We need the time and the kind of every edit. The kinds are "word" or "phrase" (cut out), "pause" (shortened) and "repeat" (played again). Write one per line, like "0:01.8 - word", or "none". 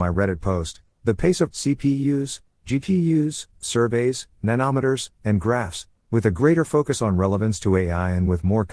0:01.5 - word